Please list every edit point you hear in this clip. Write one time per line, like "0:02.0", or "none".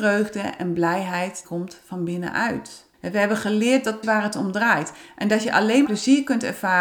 0:01.4
0:02.9
0:04.0
0:05.8